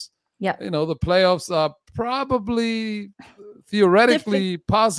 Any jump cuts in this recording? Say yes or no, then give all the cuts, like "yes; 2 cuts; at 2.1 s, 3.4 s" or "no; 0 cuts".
no; 0 cuts